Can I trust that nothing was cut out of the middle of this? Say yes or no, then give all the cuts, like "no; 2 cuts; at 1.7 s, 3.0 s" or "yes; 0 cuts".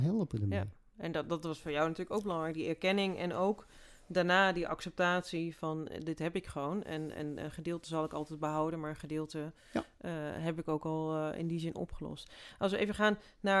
yes; 0 cuts